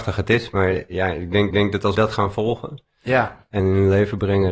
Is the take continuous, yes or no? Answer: no